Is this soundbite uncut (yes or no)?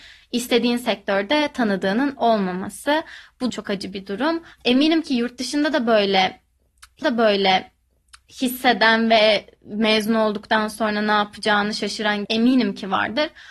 no